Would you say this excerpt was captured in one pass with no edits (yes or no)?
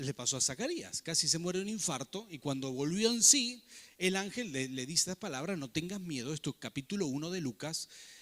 yes